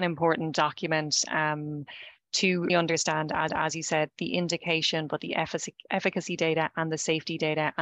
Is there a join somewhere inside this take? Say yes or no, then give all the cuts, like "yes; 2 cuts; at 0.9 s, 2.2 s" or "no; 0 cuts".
yes; 2 cuts; at 2.7 s, 3.5 s